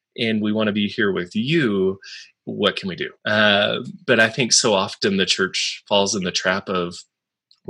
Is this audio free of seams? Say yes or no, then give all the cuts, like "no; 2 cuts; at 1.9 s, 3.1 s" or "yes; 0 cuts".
no; 1 cut; at 3.2 s